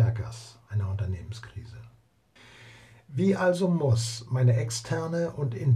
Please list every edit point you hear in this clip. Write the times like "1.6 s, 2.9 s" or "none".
2.4 s